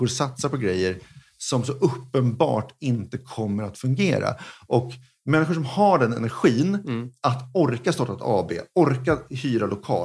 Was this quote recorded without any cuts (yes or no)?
yes